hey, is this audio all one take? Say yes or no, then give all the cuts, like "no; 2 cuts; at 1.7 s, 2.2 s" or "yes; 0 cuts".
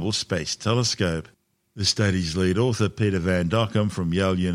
yes; 0 cuts